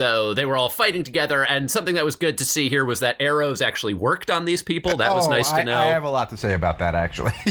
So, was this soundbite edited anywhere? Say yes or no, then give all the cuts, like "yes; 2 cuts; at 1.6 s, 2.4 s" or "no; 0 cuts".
no; 0 cuts